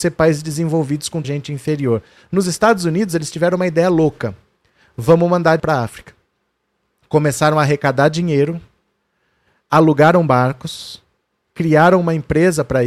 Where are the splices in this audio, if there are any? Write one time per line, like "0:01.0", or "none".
0:01.2
0:05.6

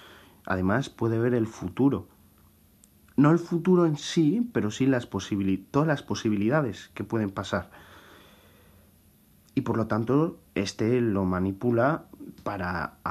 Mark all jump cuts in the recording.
none

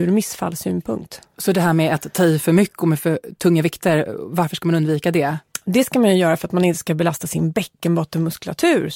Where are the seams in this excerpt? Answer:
none

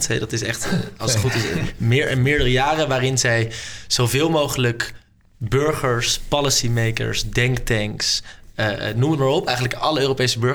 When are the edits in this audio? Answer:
none

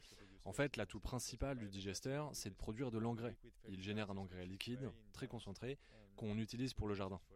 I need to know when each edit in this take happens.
none

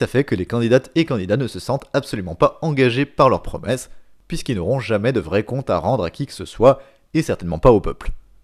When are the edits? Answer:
none

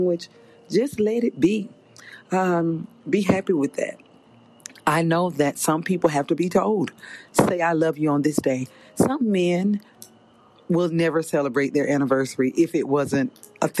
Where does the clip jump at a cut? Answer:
none

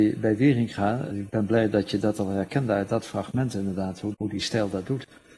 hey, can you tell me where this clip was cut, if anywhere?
0:01.1
0:04.1

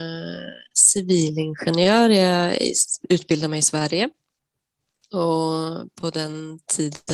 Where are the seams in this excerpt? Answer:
none

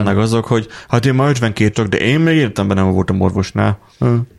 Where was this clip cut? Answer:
0:01.7

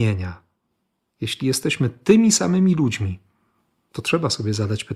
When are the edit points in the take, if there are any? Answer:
none

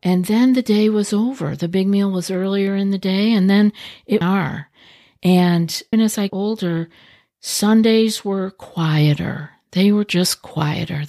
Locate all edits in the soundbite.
0:04.2
0:05.9
0:06.3

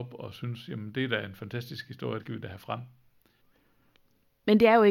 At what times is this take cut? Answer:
0:02.2

